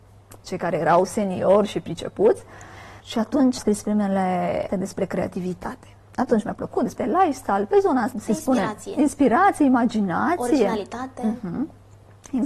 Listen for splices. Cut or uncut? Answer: cut